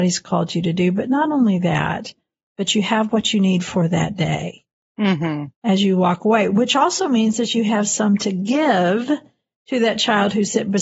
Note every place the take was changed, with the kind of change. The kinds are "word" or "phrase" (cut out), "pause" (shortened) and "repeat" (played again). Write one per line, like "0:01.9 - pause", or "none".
none